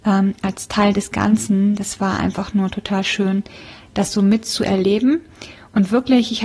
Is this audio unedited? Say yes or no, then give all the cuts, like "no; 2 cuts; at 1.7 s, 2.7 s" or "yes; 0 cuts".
yes; 0 cuts